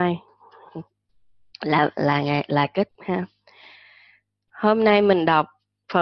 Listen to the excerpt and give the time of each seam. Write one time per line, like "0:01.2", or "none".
0:01.1
0:02.9